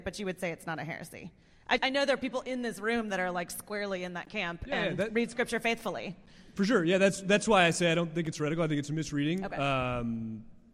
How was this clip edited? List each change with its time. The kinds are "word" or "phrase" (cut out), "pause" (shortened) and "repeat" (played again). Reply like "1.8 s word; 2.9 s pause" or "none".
1.8 s word